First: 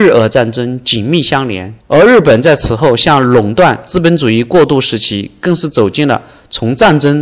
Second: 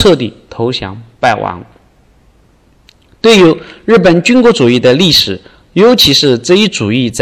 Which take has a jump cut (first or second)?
first